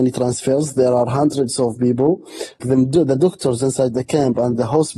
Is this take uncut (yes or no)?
no